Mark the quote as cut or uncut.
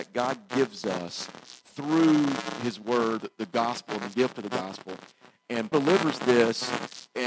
cut